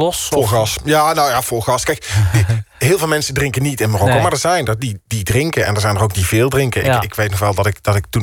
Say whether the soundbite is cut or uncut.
uncut